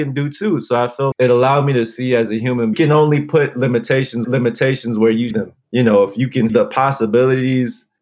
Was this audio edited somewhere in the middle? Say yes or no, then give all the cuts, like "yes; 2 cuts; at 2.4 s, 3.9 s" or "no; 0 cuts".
yes; 5 cuts; at 1.1 s, 2.7 s, 4.2 s, 5.3 s, 6.5 s